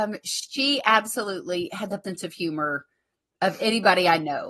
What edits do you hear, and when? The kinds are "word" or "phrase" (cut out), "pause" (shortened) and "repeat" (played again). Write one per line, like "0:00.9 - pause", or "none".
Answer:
0:02.0 - word